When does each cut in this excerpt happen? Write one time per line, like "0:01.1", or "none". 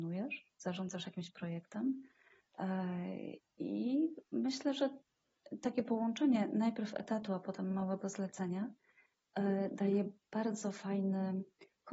none